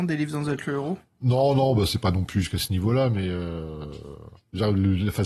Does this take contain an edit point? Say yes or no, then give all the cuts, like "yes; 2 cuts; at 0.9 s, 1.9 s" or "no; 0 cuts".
no; 0 cuts